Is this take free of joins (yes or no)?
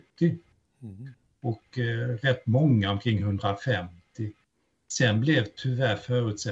yes